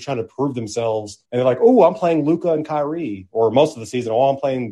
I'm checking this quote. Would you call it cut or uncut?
cut